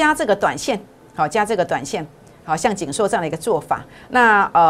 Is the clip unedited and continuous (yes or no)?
yes